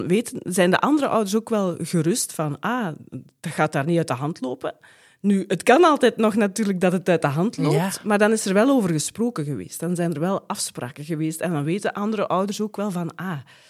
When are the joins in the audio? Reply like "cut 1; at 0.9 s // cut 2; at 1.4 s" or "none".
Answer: none